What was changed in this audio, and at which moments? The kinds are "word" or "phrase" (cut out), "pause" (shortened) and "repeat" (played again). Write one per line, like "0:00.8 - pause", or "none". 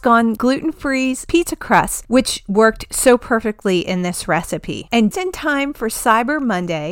0:05.1 - word